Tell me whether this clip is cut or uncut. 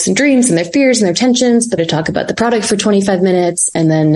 cut